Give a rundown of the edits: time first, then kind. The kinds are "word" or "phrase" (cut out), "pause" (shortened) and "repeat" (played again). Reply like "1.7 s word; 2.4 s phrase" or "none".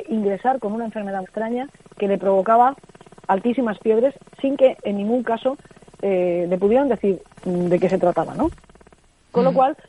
1.2 s word